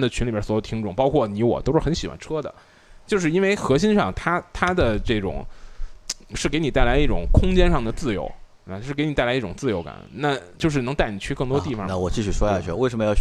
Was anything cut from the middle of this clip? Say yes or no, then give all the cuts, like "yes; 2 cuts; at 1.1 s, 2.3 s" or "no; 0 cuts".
yes; 2 cuts; at 8.5 s, 10.5 s